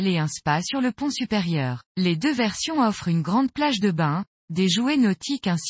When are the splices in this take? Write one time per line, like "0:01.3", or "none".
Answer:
0:01.9